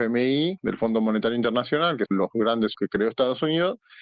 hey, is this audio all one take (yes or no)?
no